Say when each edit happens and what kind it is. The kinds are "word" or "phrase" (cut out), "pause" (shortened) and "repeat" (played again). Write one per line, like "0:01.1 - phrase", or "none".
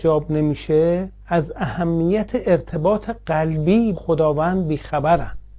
0:01.2 - pause
0:03.9 - word